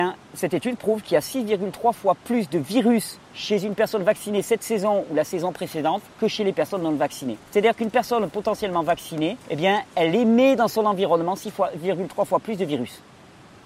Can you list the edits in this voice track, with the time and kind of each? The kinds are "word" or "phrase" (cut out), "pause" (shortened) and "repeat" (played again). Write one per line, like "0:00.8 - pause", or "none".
0:03.2 - pause
0:06.1 - pause
0:07.5 - pause
0:09.4 - pause